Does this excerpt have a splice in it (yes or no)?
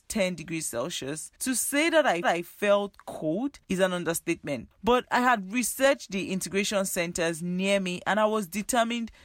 yes